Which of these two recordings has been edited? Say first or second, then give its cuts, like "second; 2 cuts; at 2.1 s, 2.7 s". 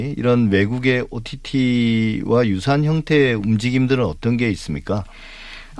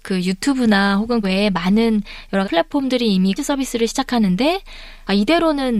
second; 3 cuts; at 1.2 s, 2.4 s, 3.4 s